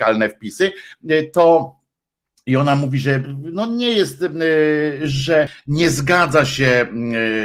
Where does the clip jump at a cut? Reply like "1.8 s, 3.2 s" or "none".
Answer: none